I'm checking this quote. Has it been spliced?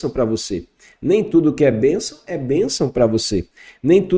no; 0 cuts

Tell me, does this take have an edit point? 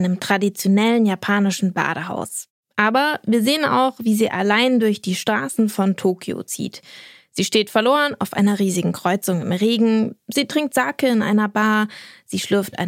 no; 0 cuts

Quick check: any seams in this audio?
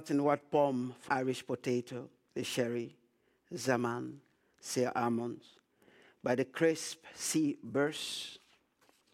yes; 2 cuts; at 1.1 s, 2.3 s

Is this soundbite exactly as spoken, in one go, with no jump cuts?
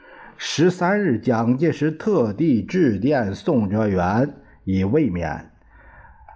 yes; 0 cuts

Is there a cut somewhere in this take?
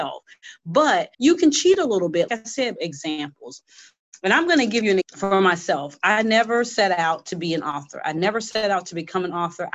yes; 4 cuts; at 1.1 s, 2.3 s, 2.8 s, 5.0 s

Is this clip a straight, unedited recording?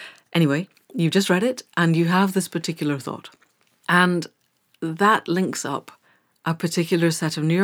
yes; 0 cuts

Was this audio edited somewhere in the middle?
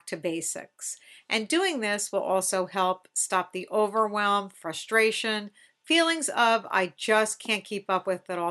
no; 0 cuts

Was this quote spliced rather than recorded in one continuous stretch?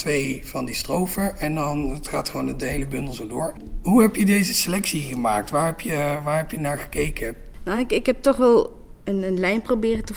no; 0 cuts

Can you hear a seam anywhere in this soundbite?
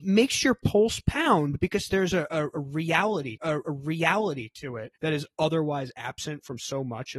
yes; 3 cuts; at 1.9 s, 3.4 s, 5.0 s

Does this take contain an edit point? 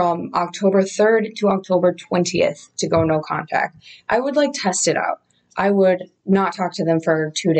no; 0 cuts

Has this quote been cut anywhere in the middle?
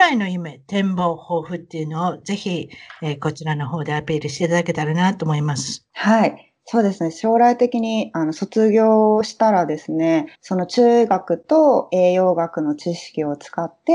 yes; 2 cuts; at 5.9 s, 10.3 s

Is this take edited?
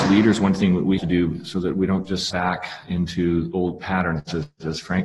yes; 2 cuts; at 1.0 s, 2.3 s

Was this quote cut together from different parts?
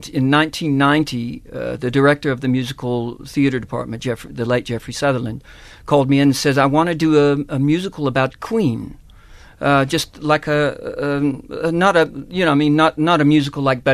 no; 0 cuts

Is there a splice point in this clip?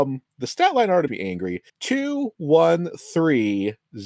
yes; 2 cuts; at 1.1 s, 1.7 s

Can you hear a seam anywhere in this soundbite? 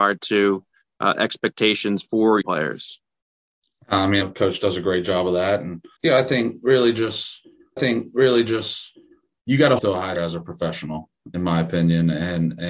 yes; 6 cuts; at 2.4 s, 4.2 s, 6.0 s, 7.8 s, 9.8 s, 10.2 s

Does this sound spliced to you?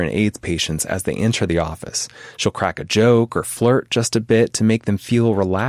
no; 0 cuts

